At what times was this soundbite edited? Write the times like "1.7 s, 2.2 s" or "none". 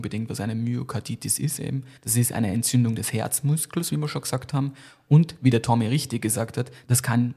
2.0 s